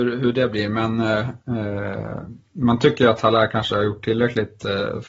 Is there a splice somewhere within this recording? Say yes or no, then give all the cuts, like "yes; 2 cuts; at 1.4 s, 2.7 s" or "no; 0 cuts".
no; 0 cuts